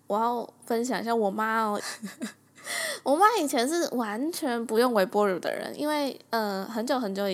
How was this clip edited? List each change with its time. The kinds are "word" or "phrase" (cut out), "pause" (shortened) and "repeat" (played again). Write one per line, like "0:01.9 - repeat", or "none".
0:01.8 - phrase